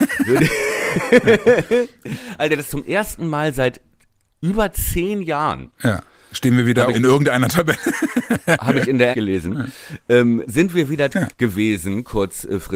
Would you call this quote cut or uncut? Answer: cut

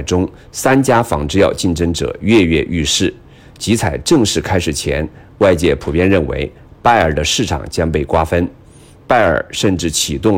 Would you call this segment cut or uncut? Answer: uncut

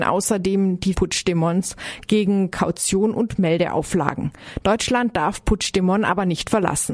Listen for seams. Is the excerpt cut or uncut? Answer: cut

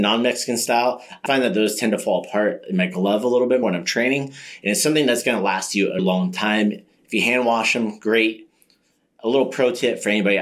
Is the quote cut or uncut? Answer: cut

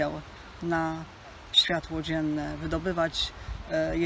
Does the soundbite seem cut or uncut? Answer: uncut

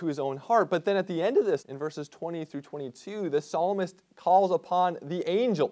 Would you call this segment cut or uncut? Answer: cut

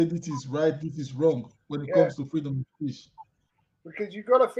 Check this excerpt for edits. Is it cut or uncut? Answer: uncut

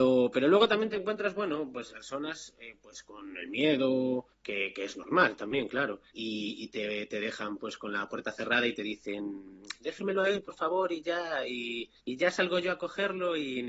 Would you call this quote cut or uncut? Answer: cut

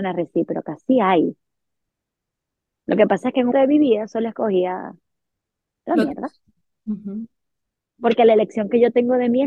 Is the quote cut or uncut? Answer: cut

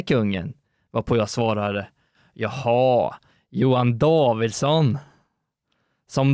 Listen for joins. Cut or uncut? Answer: uncut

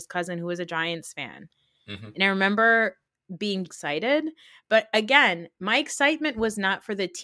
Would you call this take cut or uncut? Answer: cut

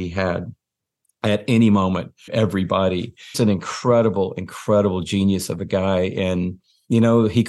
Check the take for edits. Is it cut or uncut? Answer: cut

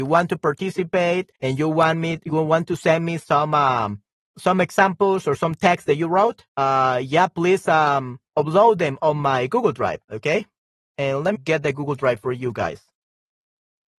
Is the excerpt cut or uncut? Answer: cut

